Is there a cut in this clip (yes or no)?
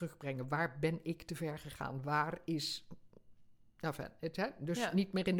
no